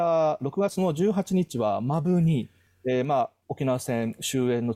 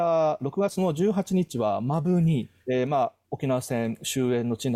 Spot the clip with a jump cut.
second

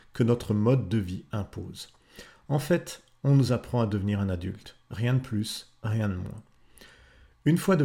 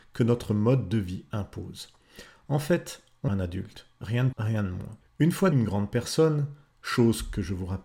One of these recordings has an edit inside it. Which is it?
second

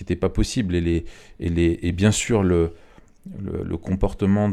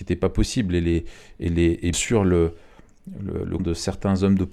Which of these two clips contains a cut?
second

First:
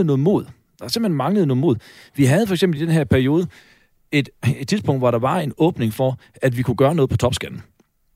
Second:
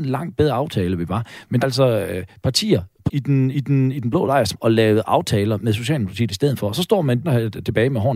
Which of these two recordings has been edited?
second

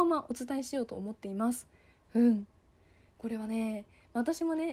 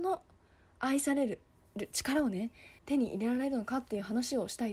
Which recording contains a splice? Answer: second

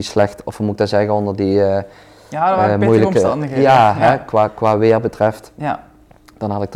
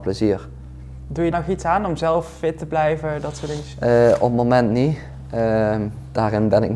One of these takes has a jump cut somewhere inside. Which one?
second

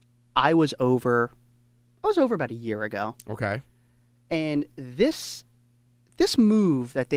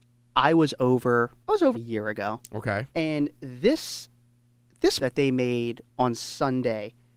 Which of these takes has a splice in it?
second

